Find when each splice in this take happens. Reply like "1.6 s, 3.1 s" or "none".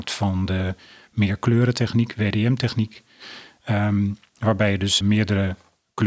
5.0 s

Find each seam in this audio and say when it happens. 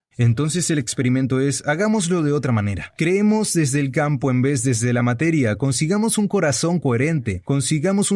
none

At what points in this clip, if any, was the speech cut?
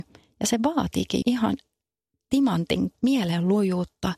1.2 s, 2.9 s

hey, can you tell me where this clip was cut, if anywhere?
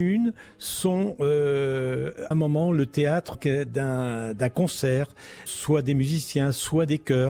2.3 s, 3.3 s, 5.5 s

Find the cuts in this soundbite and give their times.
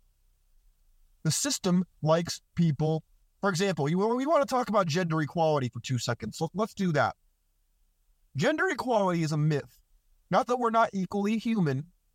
none

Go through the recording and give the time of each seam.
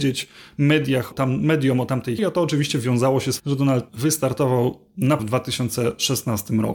1.1 s, 2.2 s, 3.4 s, 3.9 s, 5.2 s

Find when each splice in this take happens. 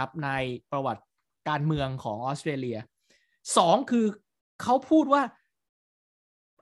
1.3 s

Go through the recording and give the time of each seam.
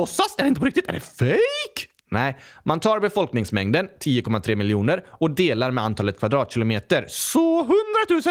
none

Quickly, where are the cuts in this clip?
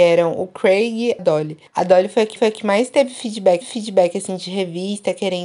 1.2 s, 1.7 s, 2.4 s, 3.6 s

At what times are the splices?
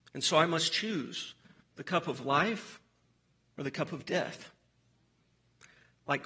none

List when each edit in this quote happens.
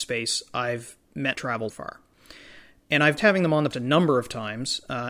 1.3 s, 1.7 s, 3.2 s, 3.7 s

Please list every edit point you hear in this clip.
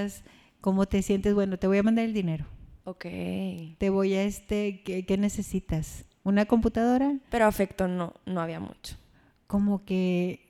2.8 s, 7.2 s

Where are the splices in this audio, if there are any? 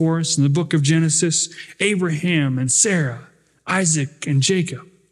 none

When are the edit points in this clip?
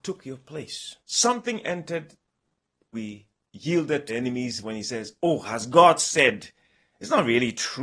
1.0 s, 2.9 s, 4.1 s, 4.6 s

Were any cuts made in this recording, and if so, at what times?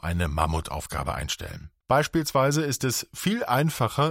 1.8 s

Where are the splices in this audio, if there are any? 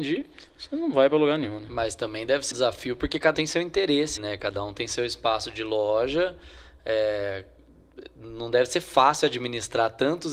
2.5 s, 3.3 s, 4.2 s

